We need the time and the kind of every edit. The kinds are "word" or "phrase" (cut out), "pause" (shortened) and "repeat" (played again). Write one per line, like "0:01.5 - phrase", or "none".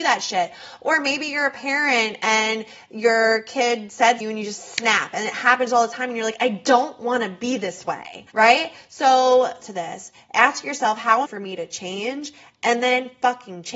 0:04.2 - phrase
0:08.3 - pause
0:09.6 - phrase
0:11.3 - phrase